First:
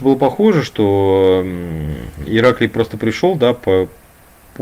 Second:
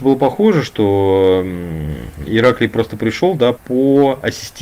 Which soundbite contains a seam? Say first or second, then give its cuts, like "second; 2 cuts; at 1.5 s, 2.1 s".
second; 1 cut; at 3.6 s